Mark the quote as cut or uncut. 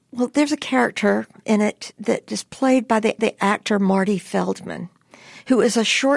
cut